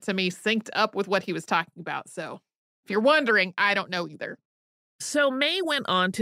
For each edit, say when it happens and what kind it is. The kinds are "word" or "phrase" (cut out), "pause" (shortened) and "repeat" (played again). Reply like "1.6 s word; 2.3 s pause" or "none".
none